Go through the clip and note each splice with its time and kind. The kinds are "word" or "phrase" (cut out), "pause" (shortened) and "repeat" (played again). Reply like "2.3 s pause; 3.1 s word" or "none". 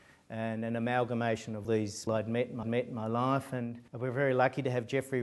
1.6 s word; 2.1 s word; 2.6 s repeat; 3.9 s pause